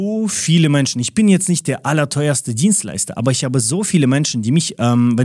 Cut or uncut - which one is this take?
uncut